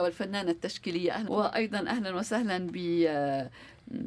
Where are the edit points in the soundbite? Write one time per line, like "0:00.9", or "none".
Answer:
0:01.3